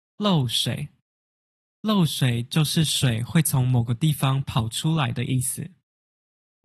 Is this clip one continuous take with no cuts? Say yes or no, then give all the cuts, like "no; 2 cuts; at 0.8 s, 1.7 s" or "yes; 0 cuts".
yes; 0 cuts